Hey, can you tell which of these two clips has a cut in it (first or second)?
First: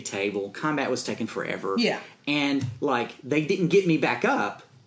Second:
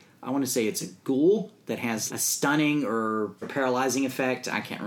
second